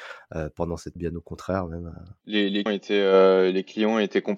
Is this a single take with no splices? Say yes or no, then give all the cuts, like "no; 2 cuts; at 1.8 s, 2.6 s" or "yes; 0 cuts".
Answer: no; 2 cuts; at 1.0 s, 2.7 s